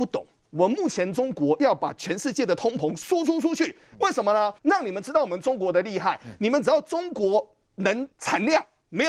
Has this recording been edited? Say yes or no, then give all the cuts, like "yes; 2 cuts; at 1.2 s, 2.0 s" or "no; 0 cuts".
yes; 2 cuts; at 4.6 s, 8.1 s